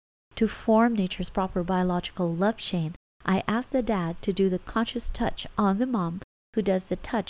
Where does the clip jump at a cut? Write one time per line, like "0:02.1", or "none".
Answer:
none